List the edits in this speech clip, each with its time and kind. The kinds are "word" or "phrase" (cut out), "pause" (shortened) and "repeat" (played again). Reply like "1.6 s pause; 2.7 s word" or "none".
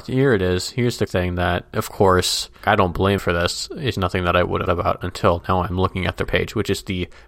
1.1 s word; 2.6 s word; 3.2 s word; 3.9 s word; 4.7 s word; 6.3 s word